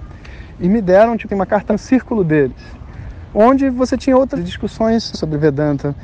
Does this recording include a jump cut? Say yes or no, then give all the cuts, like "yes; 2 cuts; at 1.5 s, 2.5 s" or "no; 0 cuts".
yes; 4 cuts; at 1.3 s, 1.7 s, 4.4 s, 5.1 s